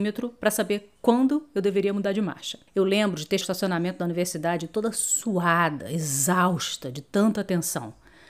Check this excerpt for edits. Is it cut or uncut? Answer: cut